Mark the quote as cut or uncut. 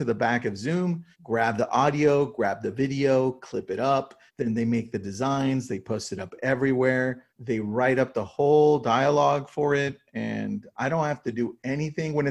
cut